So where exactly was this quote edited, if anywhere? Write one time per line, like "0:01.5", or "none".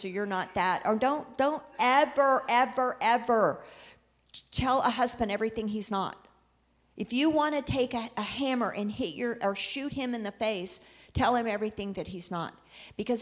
none

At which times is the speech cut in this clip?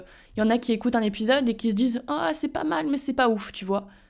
none

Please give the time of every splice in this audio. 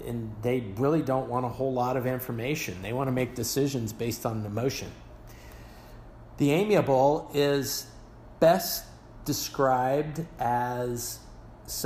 none

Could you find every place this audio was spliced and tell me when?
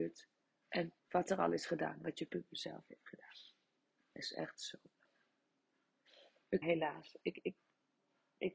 0:01.0
0:06.6

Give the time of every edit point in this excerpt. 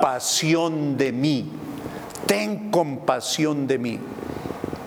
none

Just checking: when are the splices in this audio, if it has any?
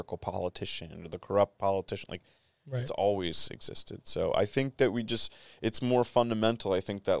none

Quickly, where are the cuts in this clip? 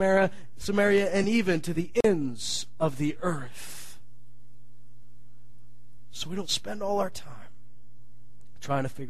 none

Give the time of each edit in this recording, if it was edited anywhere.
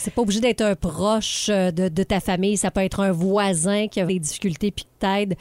0:04.1

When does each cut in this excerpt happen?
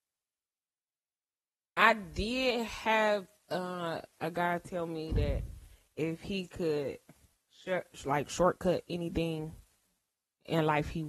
none

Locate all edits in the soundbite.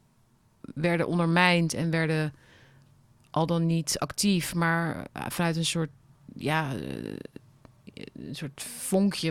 none

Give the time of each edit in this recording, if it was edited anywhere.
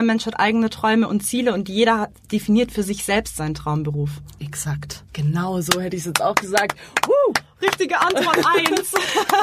0:05.1

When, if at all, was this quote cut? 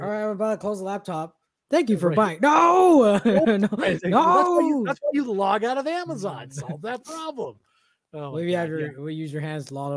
none

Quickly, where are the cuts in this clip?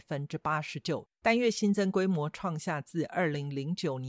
0:01.1

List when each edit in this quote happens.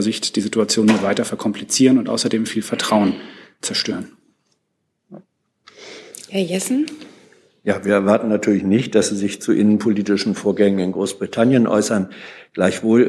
none

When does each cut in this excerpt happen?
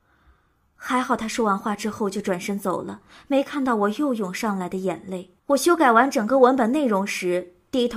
0:05.4

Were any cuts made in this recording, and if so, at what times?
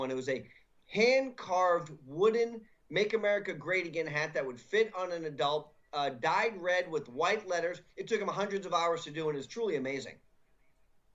0:07.9

